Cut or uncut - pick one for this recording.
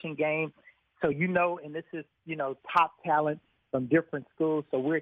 uncut